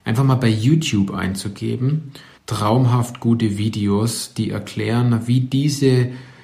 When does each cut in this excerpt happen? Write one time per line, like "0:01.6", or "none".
0:02.4